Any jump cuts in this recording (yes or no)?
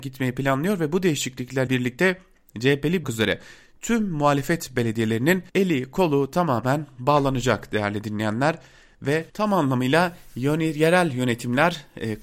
yes